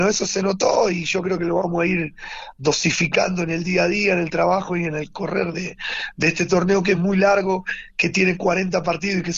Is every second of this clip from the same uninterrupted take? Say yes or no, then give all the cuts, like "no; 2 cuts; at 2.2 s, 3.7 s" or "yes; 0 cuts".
yes; 0 cuts